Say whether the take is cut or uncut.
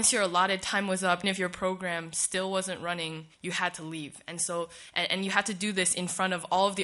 cut